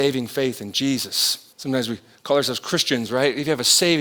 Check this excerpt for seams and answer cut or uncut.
cut